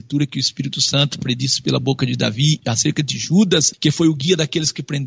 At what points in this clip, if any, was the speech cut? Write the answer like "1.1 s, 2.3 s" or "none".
none